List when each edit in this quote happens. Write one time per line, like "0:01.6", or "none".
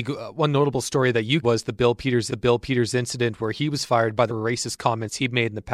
0:01.4
0:02.3
0:04.3